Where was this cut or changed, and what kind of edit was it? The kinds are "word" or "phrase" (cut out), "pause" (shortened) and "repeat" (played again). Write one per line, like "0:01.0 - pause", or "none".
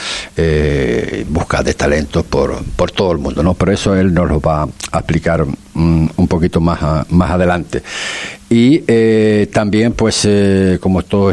none